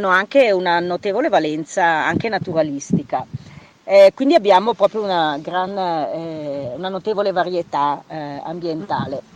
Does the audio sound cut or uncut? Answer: uncut